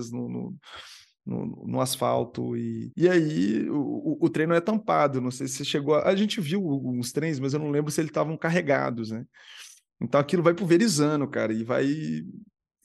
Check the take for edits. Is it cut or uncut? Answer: uncut